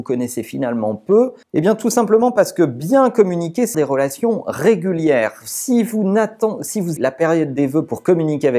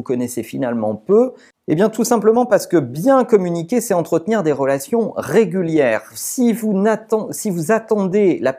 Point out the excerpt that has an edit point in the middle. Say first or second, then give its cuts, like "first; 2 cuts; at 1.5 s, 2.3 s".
first; 3 cuts; at 1.4 s, 3.7 s, 7.0 s